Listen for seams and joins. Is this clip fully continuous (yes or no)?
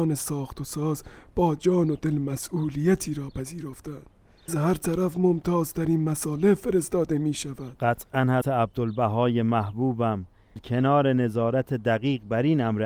no